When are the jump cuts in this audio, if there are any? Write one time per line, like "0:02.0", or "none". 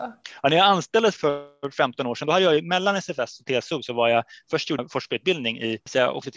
0:01.2
0:04.8